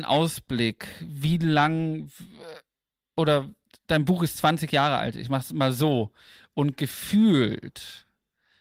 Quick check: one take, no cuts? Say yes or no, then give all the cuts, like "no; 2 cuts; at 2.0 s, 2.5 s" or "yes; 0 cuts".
yes; 0 cuts